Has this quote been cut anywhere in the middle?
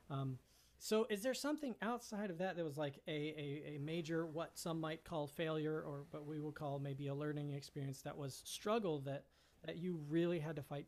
no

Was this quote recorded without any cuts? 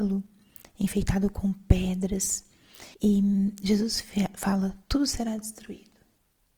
no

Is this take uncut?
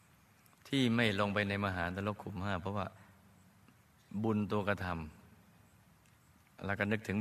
yes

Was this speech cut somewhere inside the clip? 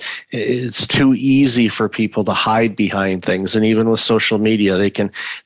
no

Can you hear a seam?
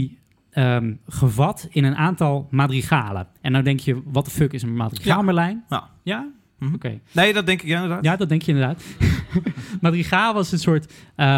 no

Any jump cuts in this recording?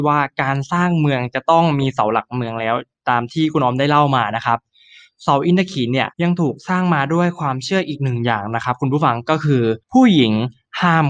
yes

